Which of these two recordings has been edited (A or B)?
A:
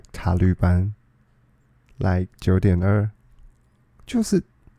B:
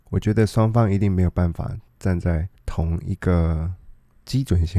B